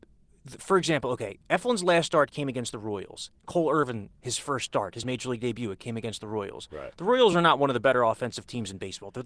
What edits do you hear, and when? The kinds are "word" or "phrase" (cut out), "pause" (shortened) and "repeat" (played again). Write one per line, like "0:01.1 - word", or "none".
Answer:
none